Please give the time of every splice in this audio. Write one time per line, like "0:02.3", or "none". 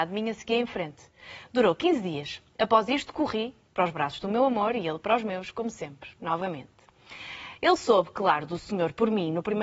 none